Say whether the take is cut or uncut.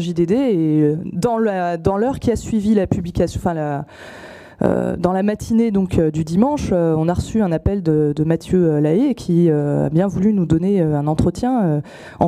uncut